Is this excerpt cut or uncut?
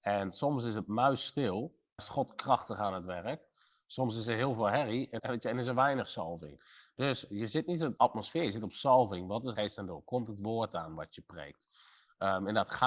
cut